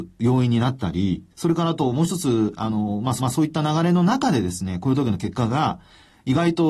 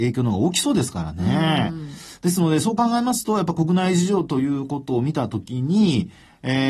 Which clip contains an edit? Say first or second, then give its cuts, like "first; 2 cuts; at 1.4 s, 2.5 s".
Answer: first; 2 cuts; at 1.3 s, 3.2 s